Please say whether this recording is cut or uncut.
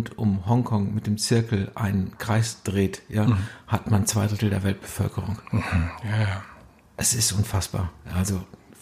uncut